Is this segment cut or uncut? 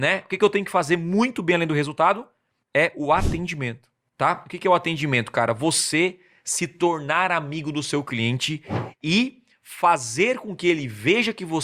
uncut